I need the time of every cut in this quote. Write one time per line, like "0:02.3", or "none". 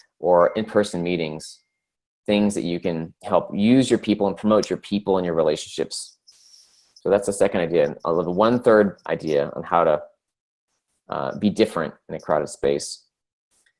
0:03.2